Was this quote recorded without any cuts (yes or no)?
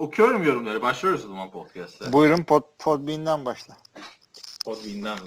yes